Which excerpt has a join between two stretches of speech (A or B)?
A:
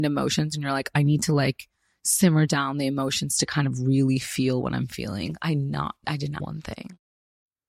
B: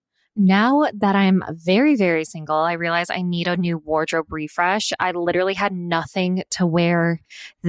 A